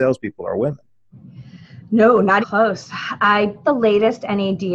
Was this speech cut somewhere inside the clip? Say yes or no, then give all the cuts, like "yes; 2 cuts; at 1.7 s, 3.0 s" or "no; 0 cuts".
yes; 2 cuts; at 2.4 s, 3.6 s